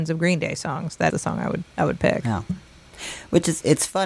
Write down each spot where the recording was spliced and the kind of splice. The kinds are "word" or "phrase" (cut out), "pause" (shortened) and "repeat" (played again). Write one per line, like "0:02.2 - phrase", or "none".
0:01.1 - word

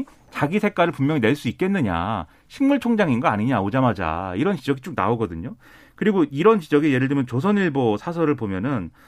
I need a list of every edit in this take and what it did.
none

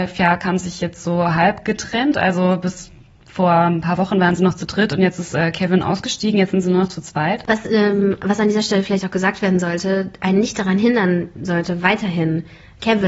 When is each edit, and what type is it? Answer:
none

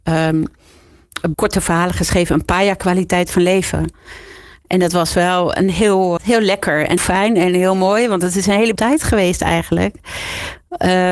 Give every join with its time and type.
0:01.3 - word
0:06.2 - word
0:07.0 - word
0:08.8 - word

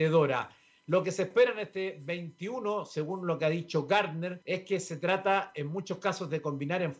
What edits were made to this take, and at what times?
0:04.4 - pause

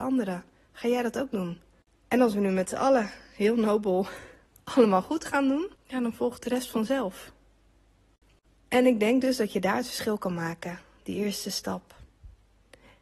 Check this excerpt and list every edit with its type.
0:05.7 - pause

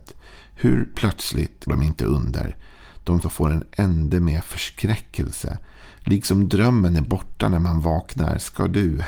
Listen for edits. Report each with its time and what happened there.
0:01.7 - word
0:03.2 - word

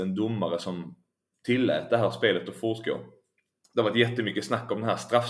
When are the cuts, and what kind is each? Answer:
none

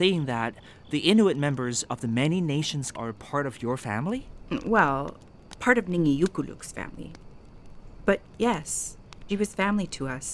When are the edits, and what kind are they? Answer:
0:02.9 - word
0:09.3 - word

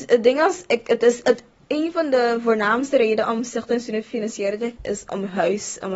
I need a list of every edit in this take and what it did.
0:01.2 - word
0:04.8 - word

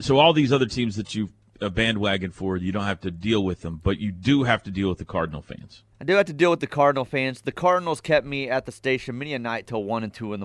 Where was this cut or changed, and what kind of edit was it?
0:05.9 - pause

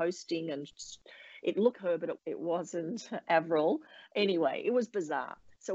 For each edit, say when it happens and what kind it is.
0:01.7 - word
0:02.2 - word

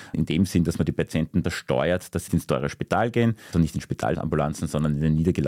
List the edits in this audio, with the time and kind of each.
0:01.4 - word
0:02.3 - word
0:03.5 - word

